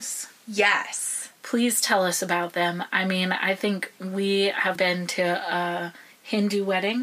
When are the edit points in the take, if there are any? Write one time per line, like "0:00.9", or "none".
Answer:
0:04.8